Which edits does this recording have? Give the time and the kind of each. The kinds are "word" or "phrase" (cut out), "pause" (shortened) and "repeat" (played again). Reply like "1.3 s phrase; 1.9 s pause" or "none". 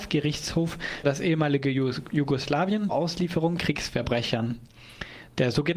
1.0 s word; 2.9 s word; 3.6 s word